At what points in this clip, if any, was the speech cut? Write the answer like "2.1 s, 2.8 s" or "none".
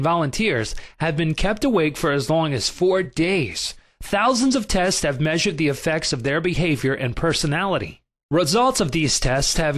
none